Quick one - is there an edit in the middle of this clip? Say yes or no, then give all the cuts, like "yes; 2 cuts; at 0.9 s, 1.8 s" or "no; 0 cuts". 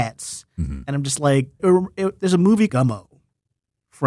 yes; 2 cuts; at 1.6 s, 2.7 s